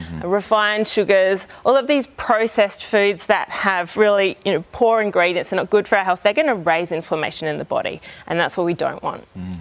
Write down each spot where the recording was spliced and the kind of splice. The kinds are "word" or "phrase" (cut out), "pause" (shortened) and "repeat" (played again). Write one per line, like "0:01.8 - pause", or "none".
none